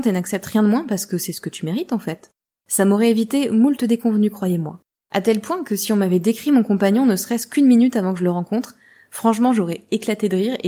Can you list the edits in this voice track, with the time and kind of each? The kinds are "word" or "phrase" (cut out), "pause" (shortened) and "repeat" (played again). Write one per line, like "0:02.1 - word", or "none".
none